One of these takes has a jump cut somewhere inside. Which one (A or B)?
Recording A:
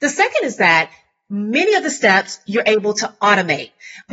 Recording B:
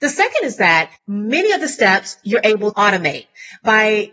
B